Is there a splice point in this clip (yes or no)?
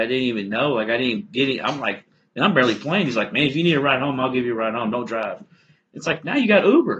no